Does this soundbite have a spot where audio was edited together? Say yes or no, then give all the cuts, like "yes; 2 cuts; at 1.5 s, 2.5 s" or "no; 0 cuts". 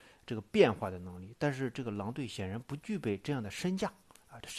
no; 0 cuts